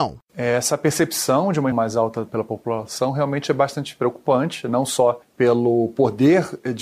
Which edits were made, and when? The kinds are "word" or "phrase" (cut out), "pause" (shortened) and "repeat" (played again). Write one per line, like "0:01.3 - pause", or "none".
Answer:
0:01.7 - word
0:02.3 - word

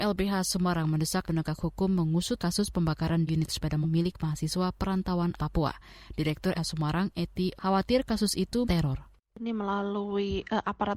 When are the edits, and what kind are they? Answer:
0:01.2 - word
0:02.4 - word
0:03.3 - word
0:03.8 - word
0:05.4 - word
0:06.5 - word
0:07.6 - word
0:08.6 - word

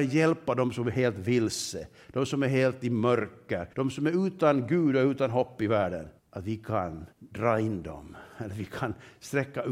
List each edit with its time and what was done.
0:03.7 - pause
0:06.2 - pause
0:07.1 - pause

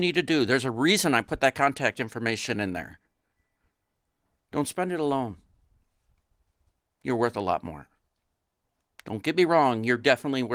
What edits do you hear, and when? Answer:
none

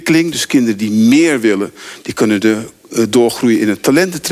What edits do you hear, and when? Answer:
none

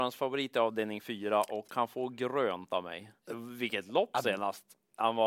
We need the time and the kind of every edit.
0:03.2 - pause

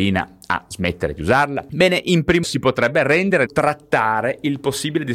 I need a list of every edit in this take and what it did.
0:02.4 - word
0:03.5 - word

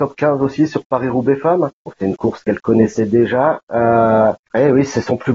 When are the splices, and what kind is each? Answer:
none

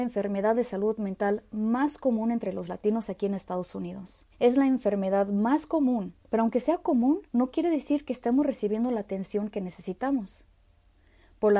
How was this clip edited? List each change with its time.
0:04.3 - pause
0:06.2 - pause
0:07.3 - pause

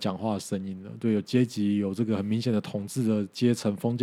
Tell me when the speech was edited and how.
none

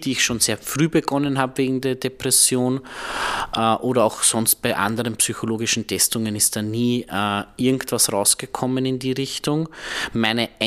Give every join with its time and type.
none

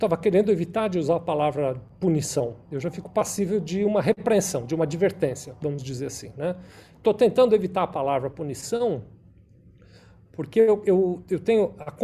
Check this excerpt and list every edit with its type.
none

